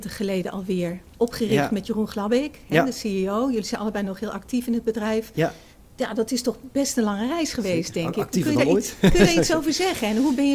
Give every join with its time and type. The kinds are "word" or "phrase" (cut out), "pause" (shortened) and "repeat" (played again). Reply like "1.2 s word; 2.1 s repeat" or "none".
none